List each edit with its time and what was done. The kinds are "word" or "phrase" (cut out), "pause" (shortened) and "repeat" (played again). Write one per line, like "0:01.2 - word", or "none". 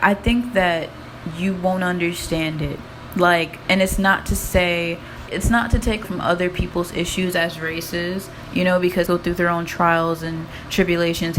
0:05.3 - word
0:06.0 - word
0:09.1 - word